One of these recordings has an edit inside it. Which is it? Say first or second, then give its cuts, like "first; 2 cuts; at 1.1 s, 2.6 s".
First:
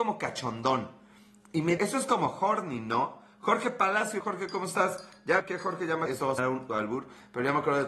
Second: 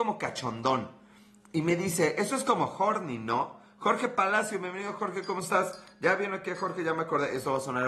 first; 6 cuts; at 1.8 s, 4.2 s, 5.4 s, 6.1 s, 6.4 s, 6.7 s